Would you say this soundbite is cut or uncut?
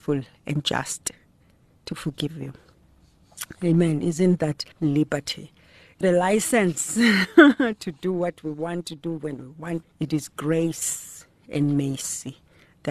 cut